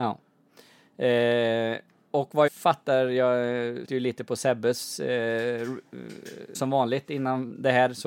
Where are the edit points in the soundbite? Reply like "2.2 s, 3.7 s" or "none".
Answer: 2.5 s, 3.8 s, 6.5 s